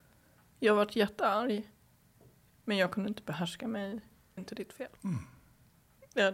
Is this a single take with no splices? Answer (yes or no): no